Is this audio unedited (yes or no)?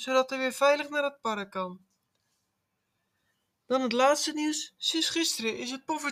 yes